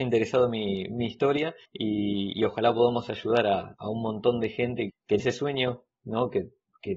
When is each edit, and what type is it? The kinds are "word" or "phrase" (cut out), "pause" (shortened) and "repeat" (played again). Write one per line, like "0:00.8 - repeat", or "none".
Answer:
0:01.6 - pause
0:03.8 - word
0:04.9 - word
0:05.2 - word